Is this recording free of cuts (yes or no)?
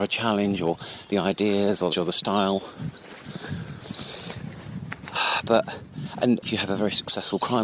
no